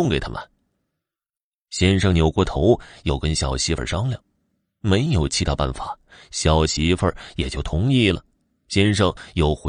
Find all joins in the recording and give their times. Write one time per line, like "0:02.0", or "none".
none